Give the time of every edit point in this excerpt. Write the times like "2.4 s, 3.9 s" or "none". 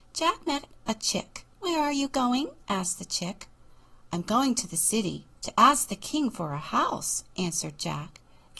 1.5 s, 2.6 s, 5.3 s

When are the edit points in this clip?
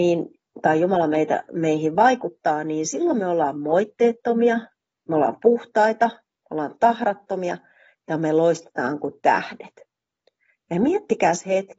none

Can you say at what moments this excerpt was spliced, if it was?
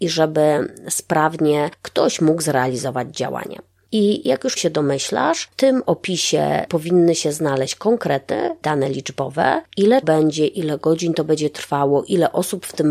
4.6 s, 6.7 s, 8.6 s, 10.0 s

